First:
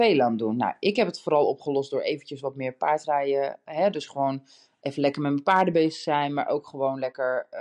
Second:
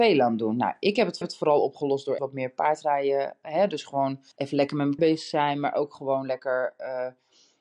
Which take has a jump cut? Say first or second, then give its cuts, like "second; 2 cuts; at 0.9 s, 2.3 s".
second; 4 cuts; at 1.2 s, 2.2 s, 4.3 s, 5.0 s